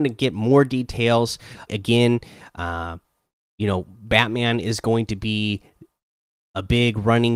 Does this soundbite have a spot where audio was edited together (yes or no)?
yes